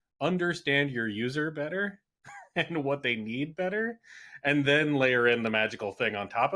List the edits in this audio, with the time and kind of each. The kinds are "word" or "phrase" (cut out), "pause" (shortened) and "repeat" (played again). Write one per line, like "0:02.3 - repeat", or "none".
none